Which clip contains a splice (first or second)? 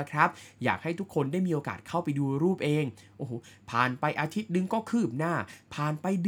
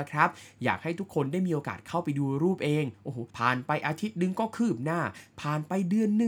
second